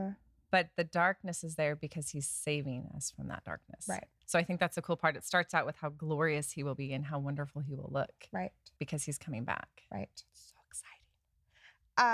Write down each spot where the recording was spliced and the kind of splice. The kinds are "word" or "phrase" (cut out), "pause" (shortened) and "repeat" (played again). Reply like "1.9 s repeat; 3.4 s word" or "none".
8.8 s pause; 10.3 s pause